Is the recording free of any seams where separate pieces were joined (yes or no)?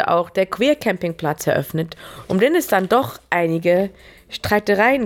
yes